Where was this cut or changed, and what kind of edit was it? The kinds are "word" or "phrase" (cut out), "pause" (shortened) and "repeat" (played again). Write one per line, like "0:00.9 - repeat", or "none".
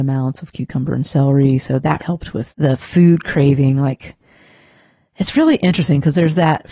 0:02.0 - word
0:02.5 - word